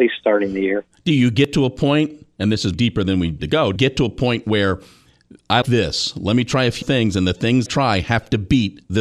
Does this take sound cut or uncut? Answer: cut